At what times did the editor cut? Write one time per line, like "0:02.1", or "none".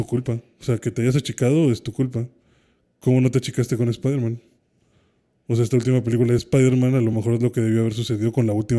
none